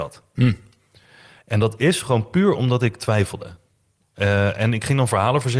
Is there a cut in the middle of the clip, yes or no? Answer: no